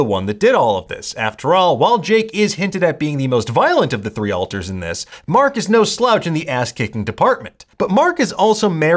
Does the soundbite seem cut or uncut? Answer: cut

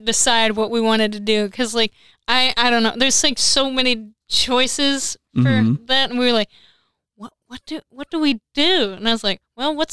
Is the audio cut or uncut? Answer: cut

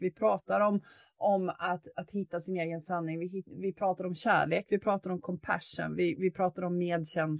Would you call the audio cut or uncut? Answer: uncut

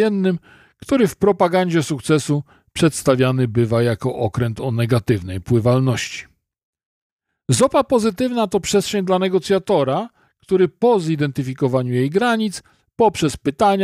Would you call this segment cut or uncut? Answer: uncut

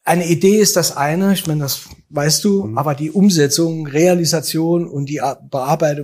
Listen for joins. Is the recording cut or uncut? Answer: uncut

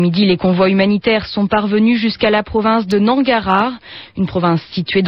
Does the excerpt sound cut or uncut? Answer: uncut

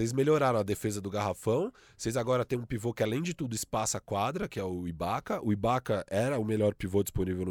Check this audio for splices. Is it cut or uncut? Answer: uncut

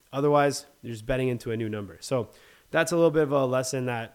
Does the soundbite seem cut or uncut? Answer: uncut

